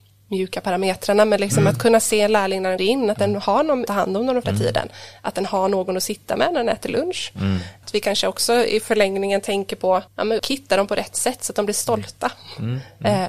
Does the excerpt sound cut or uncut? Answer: cut